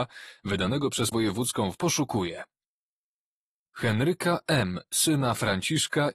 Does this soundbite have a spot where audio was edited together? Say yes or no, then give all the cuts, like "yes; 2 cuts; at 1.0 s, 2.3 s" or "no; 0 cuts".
yes; 2 cuts; at 1.1 s, 1.8 s